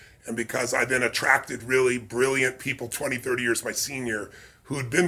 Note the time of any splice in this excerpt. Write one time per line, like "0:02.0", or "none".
none